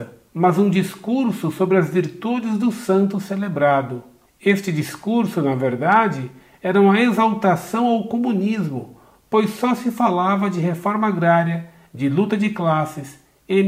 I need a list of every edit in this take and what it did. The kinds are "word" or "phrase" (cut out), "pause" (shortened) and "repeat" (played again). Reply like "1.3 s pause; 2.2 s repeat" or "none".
none